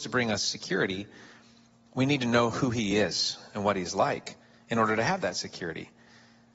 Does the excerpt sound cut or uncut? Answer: uncut